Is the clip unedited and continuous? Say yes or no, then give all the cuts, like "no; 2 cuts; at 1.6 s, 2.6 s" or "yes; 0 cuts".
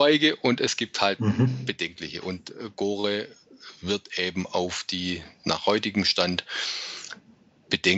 yes; 0 cuts